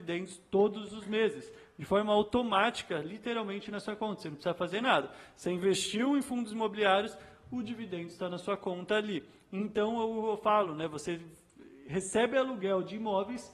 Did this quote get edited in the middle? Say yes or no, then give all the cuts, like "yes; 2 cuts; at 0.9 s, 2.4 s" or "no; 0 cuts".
no; 0 cuts